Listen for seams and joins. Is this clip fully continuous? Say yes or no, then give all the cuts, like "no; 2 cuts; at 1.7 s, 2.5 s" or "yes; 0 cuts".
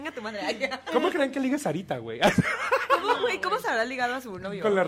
yes; 0 cuts